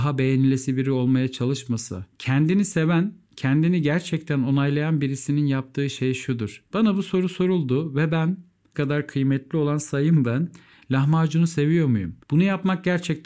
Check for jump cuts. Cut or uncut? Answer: cut